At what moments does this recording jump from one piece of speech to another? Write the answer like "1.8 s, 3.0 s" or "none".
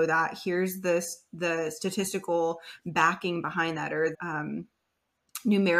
4.1 s